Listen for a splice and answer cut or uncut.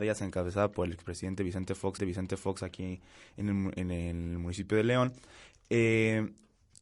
cut